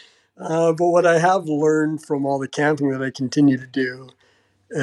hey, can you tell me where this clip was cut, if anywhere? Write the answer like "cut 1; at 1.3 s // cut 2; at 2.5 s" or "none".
none